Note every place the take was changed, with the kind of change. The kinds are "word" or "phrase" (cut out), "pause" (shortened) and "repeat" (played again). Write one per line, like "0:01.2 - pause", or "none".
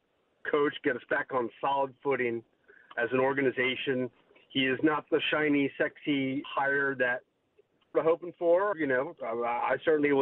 0:06.4 - word
0:07.9 - phrase
0:08.7 - word